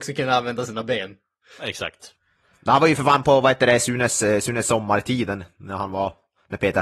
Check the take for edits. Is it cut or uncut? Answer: uncut